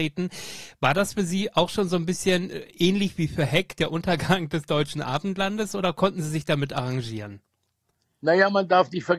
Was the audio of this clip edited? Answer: no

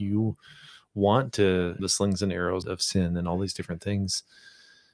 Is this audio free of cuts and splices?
no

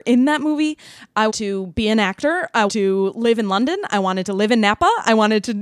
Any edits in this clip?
yes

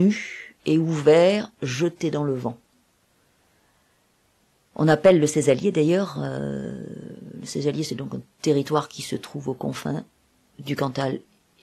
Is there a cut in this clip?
no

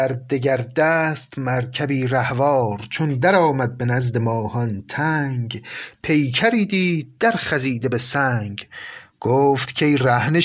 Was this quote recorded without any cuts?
yes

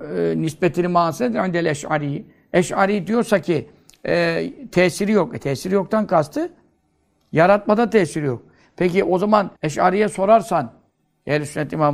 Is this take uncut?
no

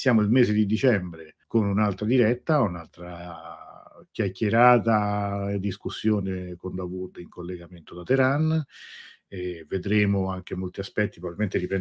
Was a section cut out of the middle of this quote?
yes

